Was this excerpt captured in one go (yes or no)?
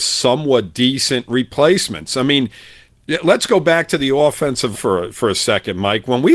no